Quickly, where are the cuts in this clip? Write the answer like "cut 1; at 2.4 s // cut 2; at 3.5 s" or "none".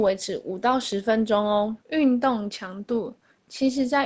cut 1; at 1.8 s